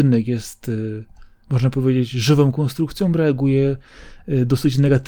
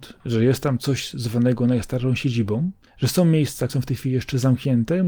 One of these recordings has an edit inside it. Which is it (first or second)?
second